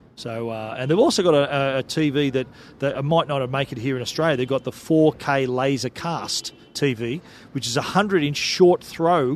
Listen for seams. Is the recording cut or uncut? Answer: uncut